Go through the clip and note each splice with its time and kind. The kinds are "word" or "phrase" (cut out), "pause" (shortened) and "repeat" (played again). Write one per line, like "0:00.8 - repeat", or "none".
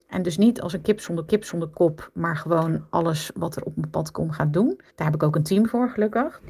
0:01.3 - repeat
0:04.9 - pause